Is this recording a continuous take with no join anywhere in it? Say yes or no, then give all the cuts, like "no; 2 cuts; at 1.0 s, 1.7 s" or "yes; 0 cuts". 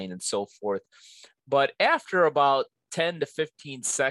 yes; 0 cuts